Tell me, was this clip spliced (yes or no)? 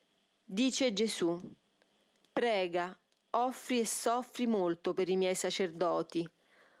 no